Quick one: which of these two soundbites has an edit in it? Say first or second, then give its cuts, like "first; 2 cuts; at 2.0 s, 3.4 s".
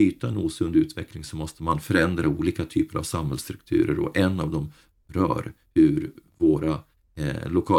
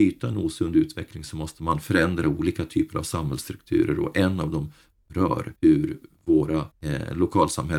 second; 2 cuts; at 5.6 s, 6.7 s